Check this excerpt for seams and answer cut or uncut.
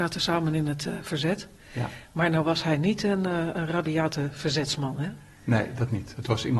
uncut